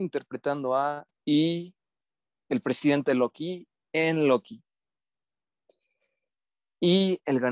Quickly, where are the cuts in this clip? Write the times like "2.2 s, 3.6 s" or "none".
1.1 s